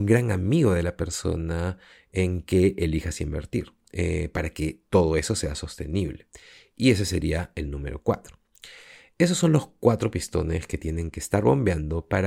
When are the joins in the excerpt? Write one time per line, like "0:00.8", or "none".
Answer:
none